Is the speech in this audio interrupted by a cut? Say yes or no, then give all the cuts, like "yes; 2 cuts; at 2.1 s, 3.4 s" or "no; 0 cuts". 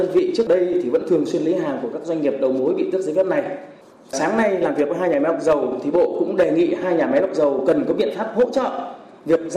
no; 0 cuts